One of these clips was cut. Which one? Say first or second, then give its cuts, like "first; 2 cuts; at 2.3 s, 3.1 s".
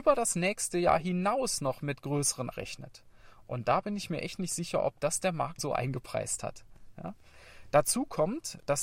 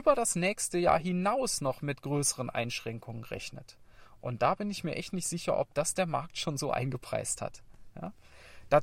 first; 2 cuts; at 2.5 s, 5.6 s